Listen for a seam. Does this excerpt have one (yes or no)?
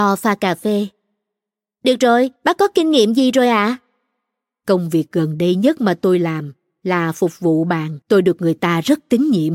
yes